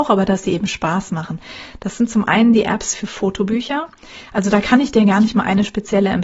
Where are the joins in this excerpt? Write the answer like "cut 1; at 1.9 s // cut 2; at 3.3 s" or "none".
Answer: none